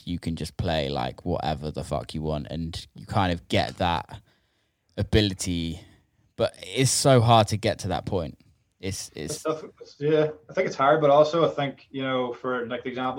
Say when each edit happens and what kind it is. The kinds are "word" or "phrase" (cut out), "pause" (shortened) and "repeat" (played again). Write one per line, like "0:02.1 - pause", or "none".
none